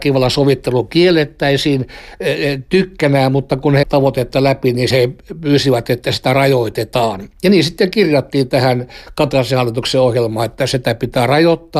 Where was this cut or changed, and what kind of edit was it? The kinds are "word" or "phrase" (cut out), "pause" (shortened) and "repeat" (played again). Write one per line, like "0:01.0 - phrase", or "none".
0:03.8 - phrase
0:04.9 - word
0:10.6 - word